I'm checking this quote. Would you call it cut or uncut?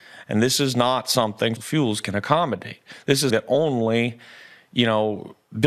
cut